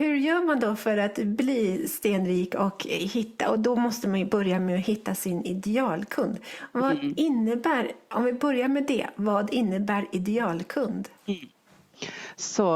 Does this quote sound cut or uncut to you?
cut